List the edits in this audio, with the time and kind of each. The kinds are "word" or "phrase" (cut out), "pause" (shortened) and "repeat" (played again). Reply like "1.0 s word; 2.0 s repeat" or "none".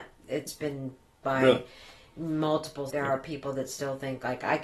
1.2 s word; 2.9 s phrase